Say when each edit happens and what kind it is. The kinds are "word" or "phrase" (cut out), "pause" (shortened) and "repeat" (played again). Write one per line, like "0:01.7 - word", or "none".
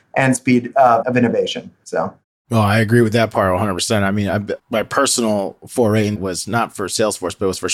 0:01.0 - word
0:04.6 - word
0:06.2 - word